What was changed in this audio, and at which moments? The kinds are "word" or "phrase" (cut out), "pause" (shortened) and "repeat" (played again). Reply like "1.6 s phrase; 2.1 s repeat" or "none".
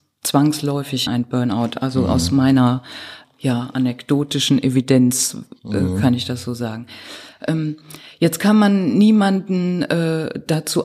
1.1 s word; 3.2 s word